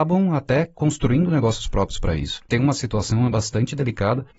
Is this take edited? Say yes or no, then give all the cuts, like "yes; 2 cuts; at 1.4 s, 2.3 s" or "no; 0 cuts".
no; 0 cuts